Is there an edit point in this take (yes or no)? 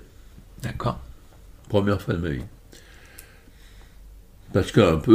no